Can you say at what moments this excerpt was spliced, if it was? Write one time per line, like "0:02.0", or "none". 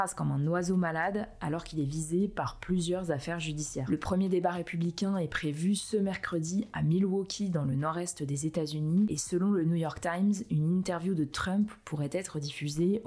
none